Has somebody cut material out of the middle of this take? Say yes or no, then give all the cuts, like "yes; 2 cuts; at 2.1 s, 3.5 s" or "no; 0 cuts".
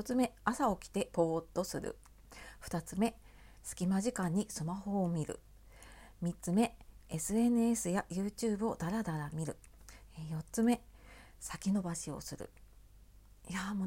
no; 0 cuts